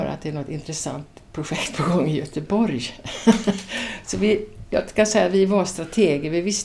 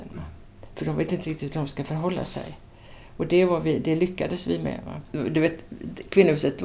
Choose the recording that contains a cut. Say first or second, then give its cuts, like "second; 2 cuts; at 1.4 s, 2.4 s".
first; 1 cut; at 1.3 s